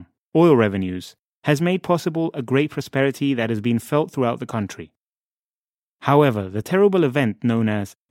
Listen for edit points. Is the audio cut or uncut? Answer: uncut